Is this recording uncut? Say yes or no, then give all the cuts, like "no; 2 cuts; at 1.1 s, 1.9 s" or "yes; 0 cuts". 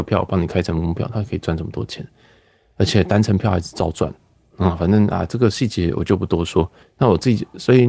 no; 1 cut; at 6.8 s